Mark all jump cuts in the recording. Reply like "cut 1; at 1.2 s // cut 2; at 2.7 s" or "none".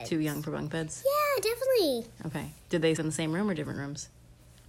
cut 1; at 2.1 s // cut 2; at 3.0 s